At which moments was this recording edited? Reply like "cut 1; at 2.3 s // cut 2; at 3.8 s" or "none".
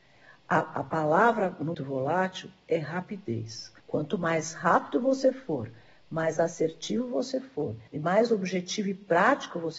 cut 1; at 1.7 s // cut 2; at 3.8 s // cut 3; at 7.9 s